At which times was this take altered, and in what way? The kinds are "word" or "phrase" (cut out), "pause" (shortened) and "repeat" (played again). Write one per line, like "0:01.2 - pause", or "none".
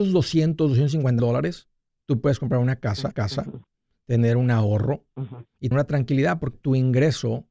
0:01.2 - word
0:03.1 - repeat
0:05.7 - word
0:06.5 - word